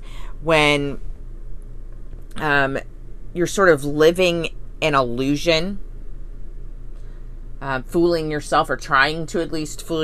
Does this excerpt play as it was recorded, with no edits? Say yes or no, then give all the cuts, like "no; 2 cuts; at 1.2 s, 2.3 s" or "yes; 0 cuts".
yes; 0 cuts